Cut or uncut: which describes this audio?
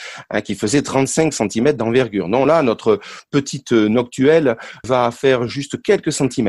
uncut